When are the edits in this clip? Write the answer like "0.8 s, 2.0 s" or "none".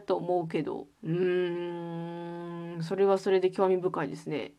0.9 s